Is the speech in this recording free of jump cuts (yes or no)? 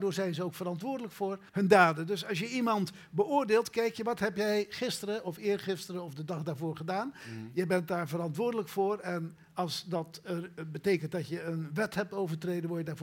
no